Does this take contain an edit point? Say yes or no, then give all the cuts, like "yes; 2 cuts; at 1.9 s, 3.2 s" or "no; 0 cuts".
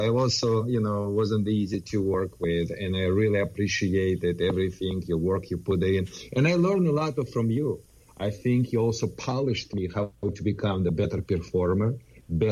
no; 0 cuts